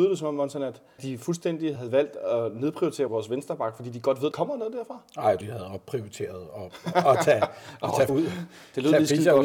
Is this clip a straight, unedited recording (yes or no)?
no